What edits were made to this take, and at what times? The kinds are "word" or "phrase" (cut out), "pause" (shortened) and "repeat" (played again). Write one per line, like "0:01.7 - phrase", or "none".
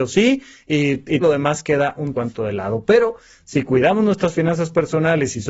0:01.2 - word
0:02.1 - word